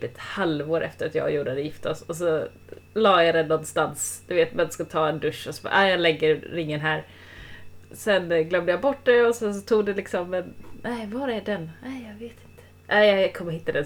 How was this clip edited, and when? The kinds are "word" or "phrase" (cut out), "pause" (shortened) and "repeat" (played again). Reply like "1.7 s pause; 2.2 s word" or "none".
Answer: 2.8 s pause